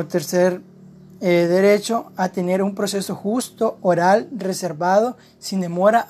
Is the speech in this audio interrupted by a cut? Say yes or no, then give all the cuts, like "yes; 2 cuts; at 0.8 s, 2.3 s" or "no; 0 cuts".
no; 0 cuts